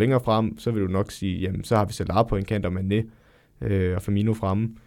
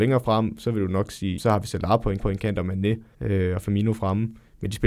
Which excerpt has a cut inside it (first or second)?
second